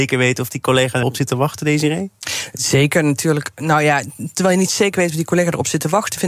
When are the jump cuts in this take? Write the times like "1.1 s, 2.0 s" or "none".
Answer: 1.0 s

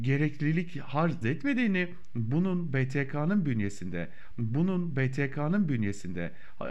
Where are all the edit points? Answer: 1.2 s, 4.3 s

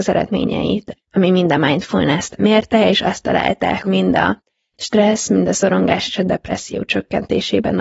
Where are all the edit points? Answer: 0.9 s, 3.8 s

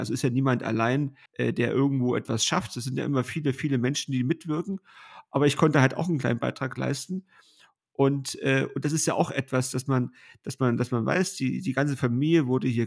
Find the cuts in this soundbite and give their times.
1.3 s

